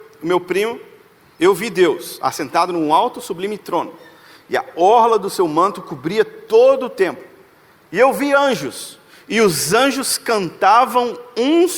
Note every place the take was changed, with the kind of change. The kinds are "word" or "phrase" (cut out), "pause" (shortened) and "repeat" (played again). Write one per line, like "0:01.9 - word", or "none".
none